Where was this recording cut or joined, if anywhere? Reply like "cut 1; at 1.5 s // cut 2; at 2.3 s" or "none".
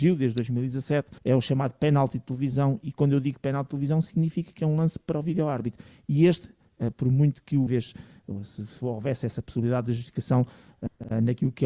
cut 1; at 1.2 s // cut 2; at 7.7 s